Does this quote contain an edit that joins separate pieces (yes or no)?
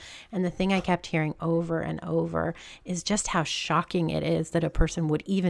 no